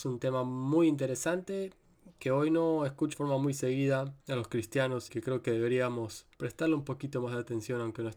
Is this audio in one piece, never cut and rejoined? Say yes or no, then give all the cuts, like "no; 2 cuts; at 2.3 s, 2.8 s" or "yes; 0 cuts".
no; 4 cuts; at 3.1 s, 4.2 s, 5.1 s, 6.3 s